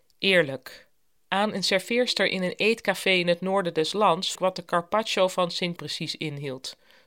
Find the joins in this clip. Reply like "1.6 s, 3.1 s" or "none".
1.2 s, 4.3 s, 5.8 s